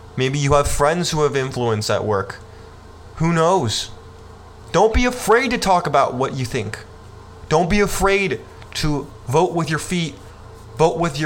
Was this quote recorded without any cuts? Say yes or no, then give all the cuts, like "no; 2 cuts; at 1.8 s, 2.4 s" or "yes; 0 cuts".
yes; 0 cuts